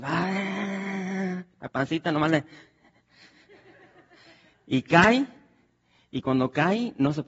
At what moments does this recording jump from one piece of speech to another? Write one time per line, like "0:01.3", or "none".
none

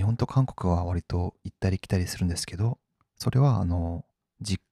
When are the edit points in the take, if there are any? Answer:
none

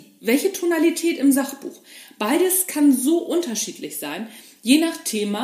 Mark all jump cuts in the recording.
none

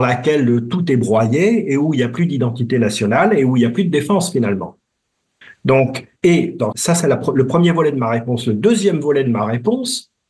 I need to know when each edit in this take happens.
0:06.2
0:06.7

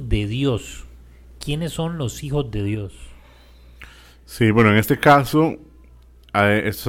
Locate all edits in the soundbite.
none

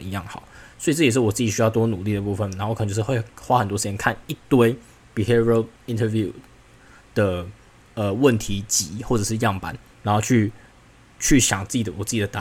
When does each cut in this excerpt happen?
none

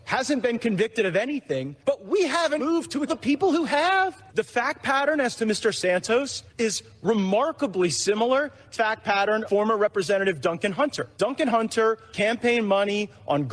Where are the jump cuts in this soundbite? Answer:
0:01.8
0:02.6
0:03.1
0:04.3
0:06.5
0:08.7
0:09.5
0:11.1
0:12.1

